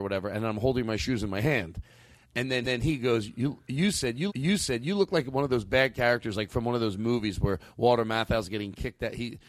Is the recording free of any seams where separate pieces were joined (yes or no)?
no